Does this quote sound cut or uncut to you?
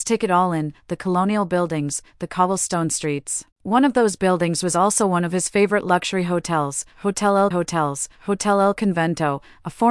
cut